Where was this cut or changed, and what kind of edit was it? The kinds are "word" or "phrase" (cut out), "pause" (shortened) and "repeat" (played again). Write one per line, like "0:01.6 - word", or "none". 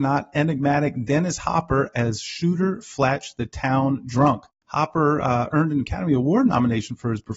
none